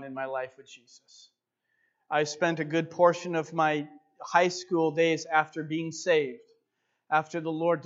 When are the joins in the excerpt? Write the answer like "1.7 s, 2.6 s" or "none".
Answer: none